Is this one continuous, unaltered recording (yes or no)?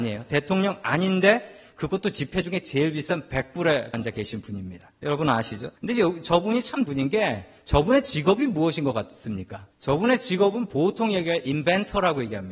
no